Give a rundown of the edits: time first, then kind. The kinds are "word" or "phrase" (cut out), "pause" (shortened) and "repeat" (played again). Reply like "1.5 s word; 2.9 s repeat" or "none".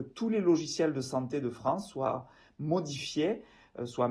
none